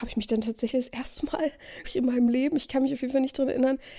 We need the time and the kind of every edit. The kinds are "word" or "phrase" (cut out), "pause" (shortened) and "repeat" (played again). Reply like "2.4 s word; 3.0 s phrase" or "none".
1.8 s word